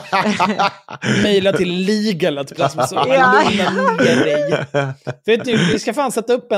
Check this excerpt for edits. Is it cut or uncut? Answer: cut